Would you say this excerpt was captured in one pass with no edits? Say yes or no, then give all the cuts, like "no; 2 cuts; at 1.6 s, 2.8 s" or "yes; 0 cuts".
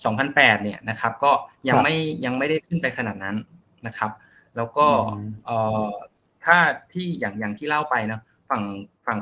yes; 0 cuts